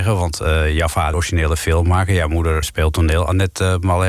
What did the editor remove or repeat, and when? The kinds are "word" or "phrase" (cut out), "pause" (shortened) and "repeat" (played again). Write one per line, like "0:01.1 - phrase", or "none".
0:01.1 - phrase
0:02.6 - word